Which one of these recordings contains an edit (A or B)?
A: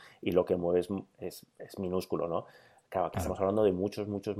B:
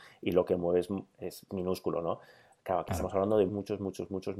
B